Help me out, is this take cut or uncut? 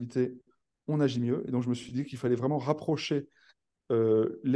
uncut